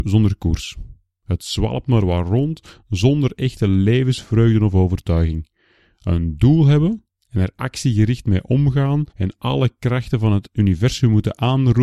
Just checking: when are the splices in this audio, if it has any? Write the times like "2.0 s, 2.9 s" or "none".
9.1 s